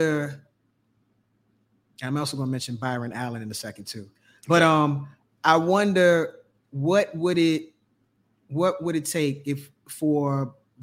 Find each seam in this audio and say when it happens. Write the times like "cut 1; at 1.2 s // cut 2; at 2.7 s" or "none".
none